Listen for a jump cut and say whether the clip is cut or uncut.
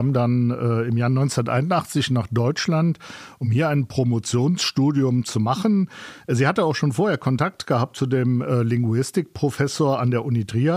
uncut